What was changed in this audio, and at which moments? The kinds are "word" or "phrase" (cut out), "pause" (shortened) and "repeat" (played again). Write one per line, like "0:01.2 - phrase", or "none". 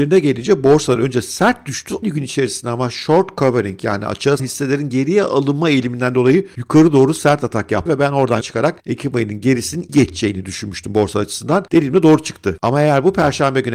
0:02.0 - word
0:04.4 - word
0:07.9 - word
0:08.4 - word
0:09.9 - word